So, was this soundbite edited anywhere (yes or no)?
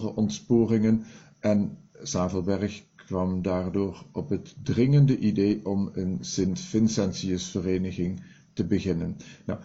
no